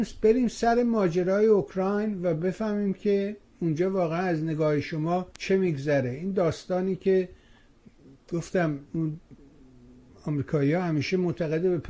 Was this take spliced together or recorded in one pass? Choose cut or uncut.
cut